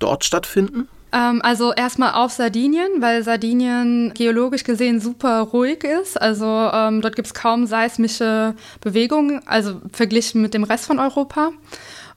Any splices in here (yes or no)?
no